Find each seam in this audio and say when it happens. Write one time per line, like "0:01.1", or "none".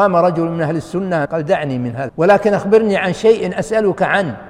0:01.3
0:02.1